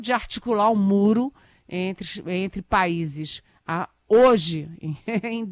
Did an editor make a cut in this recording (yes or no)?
no